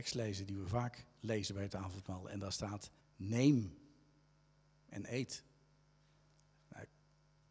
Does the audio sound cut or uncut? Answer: cut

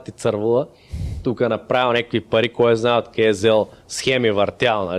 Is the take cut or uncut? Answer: uncut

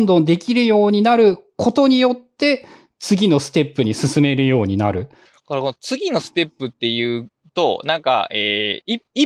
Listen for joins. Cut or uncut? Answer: uncut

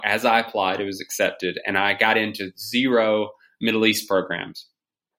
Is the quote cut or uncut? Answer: uncut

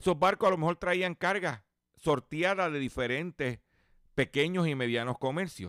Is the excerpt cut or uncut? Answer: uncut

